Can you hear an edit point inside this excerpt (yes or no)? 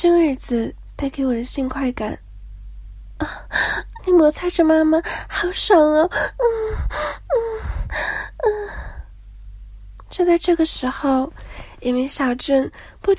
yes